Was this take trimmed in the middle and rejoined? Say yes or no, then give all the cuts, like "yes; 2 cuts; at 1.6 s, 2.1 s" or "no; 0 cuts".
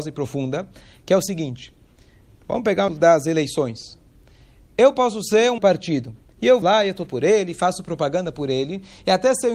yes; 4 cuts; at 2.9 s, 5.6 s, 6.6 s, 7.1 s